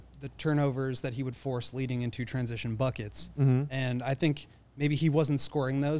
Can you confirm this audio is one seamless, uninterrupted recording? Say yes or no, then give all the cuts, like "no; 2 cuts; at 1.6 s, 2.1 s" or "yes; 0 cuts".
yes; 0 cuts